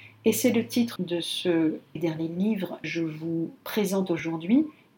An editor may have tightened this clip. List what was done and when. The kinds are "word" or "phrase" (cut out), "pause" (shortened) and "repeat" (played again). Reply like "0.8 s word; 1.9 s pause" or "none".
1.0 s word; 2.0 s word; 2.8 s word